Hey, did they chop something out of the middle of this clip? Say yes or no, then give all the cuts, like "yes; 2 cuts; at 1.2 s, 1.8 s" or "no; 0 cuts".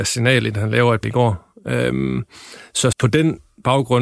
yes; 2 cuts; at 1.0 s, 2.9 s